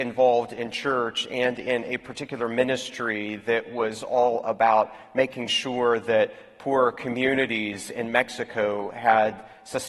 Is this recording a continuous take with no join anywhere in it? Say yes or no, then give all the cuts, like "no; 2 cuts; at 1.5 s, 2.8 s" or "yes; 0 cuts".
yes; 0 cuts